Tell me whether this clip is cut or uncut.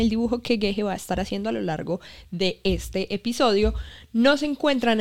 uncut